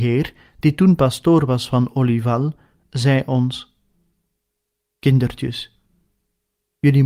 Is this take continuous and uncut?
yes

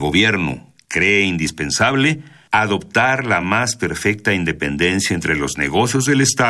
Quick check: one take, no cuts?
yes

